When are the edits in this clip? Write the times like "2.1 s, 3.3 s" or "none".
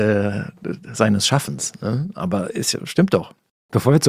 none

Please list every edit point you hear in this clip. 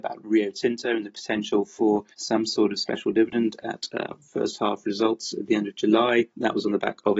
2.1 s, 6.3 s

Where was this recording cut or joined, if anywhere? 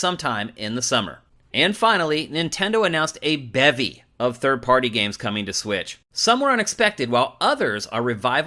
6.1 s

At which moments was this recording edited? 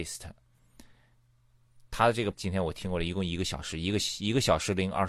2.3 s

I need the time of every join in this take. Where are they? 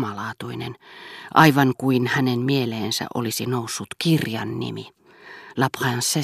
none

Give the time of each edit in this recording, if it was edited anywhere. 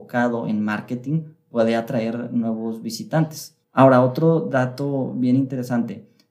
3.6 s

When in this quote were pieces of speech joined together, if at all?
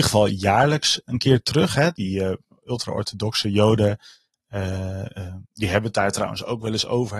none

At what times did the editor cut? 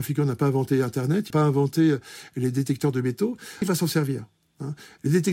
1.3 s, 3.6 s

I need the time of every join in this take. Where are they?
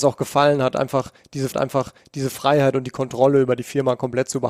1.5 s

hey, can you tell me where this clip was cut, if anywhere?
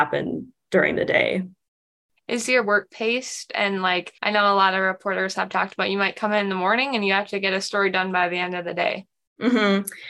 2.9 s, 4.2 s

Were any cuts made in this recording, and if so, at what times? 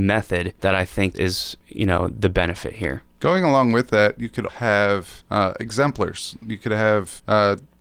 1.1 s, 4.5 s

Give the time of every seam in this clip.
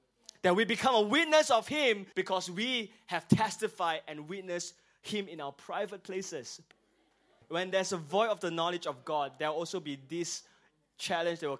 2.1 s

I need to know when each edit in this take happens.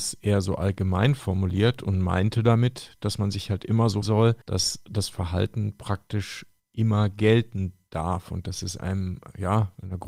4.0 s, 4.4 s, 6.6 s

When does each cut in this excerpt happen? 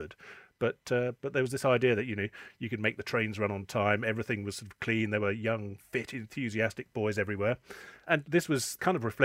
none

